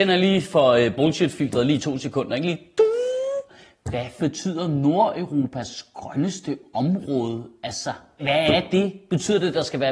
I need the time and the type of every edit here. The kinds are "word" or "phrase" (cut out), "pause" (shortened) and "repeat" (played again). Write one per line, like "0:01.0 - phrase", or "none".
0:04.2 - word
0:08.2 - word